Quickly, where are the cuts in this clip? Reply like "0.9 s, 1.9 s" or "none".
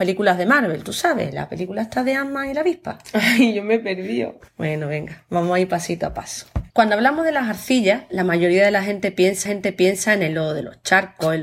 4.5 s, 6.7 s, 9.5 s